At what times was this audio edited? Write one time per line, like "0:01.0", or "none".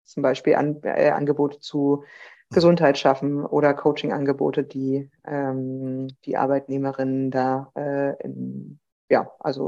0:06.2